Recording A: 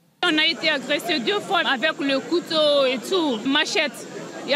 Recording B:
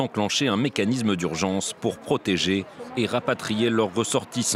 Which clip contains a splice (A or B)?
A